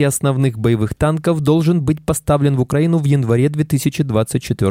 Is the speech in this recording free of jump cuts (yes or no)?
yes